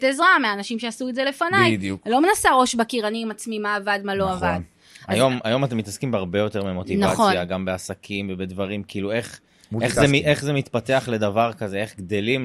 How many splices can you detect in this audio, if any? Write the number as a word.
zero